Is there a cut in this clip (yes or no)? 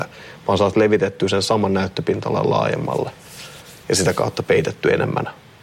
no